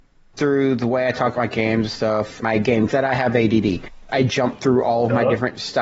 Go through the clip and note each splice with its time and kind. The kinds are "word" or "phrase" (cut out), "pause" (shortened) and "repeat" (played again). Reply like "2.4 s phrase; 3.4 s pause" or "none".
1.4 s word; 2.4 s word; 2.9 s word; 4.1 s word